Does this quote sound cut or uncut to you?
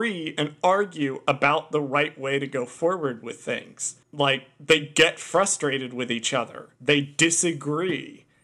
cut